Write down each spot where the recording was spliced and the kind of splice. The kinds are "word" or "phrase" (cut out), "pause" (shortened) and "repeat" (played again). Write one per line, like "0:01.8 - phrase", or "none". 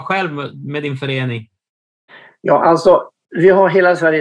0:02.1 - pause